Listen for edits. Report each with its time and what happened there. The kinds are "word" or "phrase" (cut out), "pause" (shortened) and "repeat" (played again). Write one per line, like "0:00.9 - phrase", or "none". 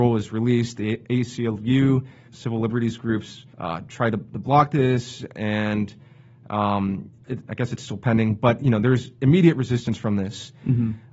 0:02.3 - phrase
0:03.5 - pause
0:07.2 - pause